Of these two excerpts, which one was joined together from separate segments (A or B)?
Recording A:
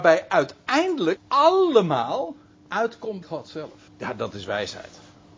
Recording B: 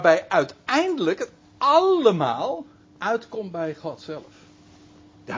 A